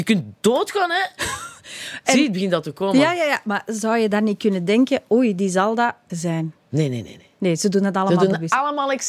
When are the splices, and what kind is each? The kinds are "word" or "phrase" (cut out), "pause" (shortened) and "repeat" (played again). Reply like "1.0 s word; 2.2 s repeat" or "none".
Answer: 6.1 s phrase; 6.6 s pause